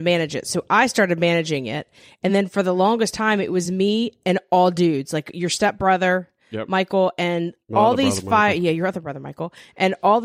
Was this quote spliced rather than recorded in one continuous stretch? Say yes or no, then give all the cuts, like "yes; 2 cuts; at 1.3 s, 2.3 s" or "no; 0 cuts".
no; 0 cuts